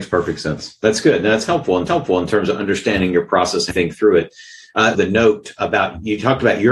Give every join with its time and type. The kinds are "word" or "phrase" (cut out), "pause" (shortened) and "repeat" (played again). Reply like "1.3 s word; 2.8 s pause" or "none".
1.9 s repeat; 3.7 s word; 4.9 s word